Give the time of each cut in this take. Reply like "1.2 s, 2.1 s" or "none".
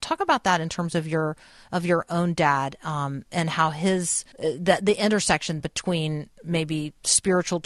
4.3 s, 5.6 s